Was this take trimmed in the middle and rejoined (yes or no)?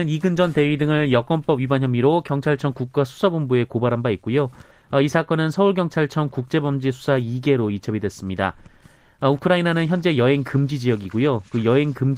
no